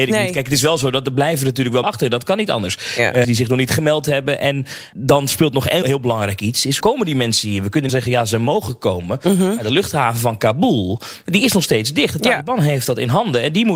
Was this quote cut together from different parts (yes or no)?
yes